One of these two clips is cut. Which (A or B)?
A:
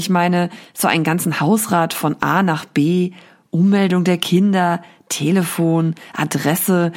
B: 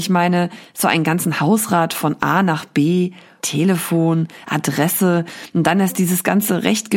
B